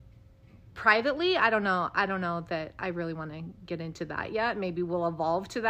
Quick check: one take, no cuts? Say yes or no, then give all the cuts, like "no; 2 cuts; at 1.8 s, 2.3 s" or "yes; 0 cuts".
yes; 0 cuts